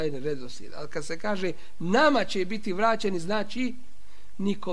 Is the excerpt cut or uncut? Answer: uncut